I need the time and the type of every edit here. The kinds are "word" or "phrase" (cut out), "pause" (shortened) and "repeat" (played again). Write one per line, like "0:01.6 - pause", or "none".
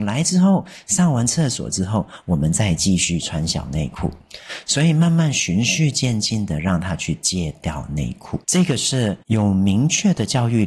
0:08.4 - pause
0:09.2 - pause